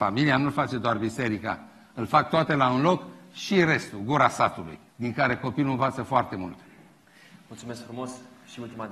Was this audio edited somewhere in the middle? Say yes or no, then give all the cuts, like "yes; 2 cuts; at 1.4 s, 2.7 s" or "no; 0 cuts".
yes; 1 cut; at 4.9 s